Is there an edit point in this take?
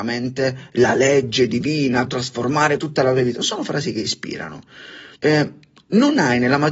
yes; 3 cuts; at 2.1 s, 2.8 s, 5.2 s

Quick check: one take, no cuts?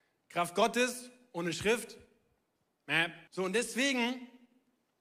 no; 1 cut; at 3.3 s

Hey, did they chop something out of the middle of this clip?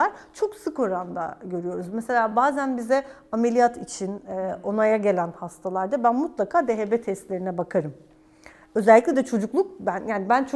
no; 0 cuts

